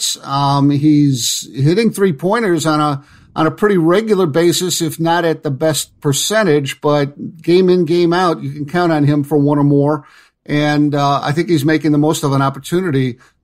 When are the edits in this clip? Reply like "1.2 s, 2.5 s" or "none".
none